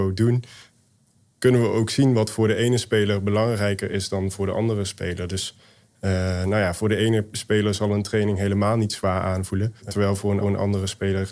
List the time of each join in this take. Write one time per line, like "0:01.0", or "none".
0:09.8
0:10.4